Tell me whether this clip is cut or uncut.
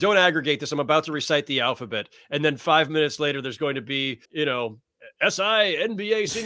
cut